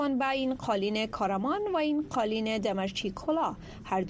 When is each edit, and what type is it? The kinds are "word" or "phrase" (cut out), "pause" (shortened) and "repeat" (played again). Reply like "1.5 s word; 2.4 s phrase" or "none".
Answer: none